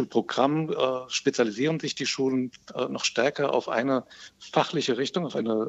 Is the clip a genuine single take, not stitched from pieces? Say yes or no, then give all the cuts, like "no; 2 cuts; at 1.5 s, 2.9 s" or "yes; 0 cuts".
yes; 0 cuts